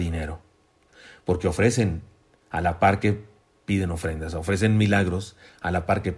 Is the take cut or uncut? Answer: uncut